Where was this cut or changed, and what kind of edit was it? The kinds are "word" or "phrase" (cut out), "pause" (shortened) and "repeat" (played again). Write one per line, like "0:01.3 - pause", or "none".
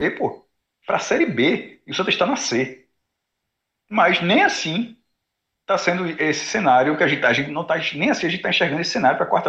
none